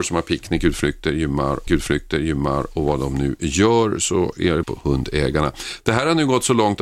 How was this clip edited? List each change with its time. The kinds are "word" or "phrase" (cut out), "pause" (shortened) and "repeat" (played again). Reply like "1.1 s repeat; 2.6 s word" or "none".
1.7 s repeat; 4.6 s phrase